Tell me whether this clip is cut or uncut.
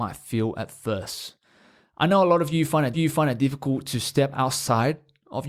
cut